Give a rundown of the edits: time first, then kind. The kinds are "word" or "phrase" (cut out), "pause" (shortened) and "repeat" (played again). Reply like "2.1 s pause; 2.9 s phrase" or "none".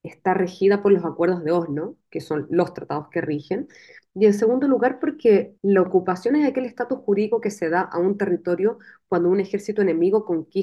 5.6 s pause